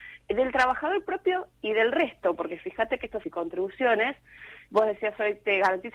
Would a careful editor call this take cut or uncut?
cut